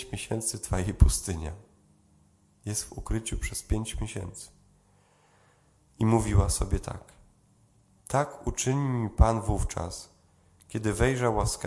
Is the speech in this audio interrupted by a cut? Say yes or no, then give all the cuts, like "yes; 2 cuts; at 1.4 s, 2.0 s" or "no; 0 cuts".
no; 0 cuts